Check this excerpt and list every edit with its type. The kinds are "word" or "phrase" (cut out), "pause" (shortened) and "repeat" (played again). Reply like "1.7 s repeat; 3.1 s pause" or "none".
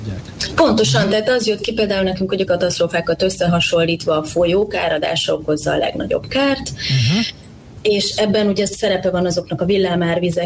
2.5 s phrase